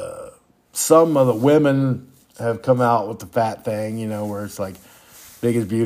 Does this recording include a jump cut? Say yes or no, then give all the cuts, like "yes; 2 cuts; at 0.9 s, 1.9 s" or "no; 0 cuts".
no; 0 cuts